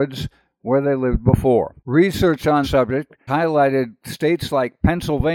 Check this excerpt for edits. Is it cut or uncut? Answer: cut